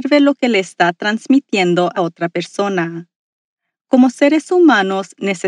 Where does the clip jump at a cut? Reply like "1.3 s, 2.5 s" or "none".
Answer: 2.0 s